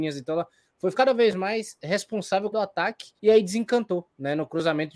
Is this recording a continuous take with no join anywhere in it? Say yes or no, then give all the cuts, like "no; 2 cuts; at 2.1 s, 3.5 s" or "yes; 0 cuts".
no; 3 cuts; at 0.9 s, 2.5 s, 3.2 s